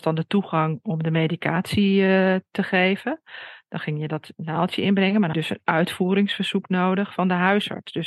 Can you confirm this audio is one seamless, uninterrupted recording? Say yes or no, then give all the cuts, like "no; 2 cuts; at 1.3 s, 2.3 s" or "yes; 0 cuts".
no; 1 cut; at 5.3 s